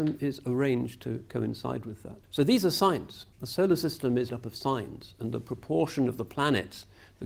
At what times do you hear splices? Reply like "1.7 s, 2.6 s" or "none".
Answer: 2.2 s, 3.3 s, 4.3 s